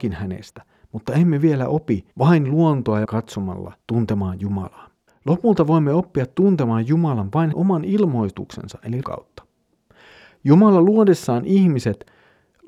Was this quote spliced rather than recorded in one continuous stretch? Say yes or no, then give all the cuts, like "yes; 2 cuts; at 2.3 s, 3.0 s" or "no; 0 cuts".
yes; 6 cuts; at 2.1 s, 3.1 s, 3.8 s, 5.1 s, 7.5 s, 9.0 s